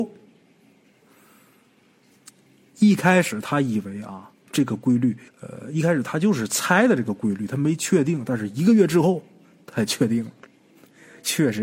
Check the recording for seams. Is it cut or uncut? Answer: cut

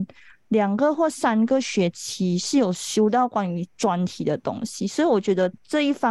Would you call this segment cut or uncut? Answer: uncut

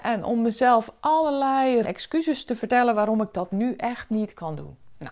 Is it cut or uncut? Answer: cut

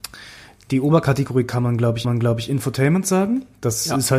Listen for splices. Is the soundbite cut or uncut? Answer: cut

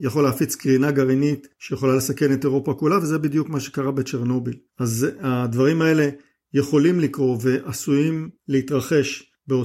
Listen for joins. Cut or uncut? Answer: uncut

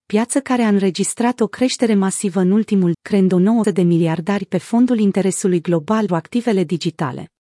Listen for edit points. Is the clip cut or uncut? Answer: cut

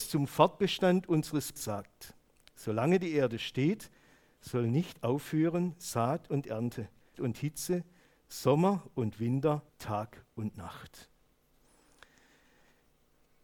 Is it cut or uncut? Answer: cut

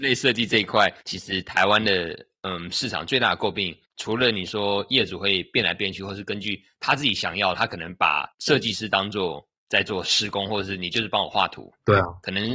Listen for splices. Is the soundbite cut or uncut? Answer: cut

